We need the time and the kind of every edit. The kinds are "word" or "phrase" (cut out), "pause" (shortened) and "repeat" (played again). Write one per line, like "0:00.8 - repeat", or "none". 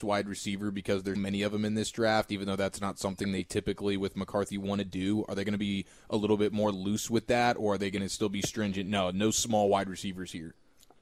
0:01.2 - word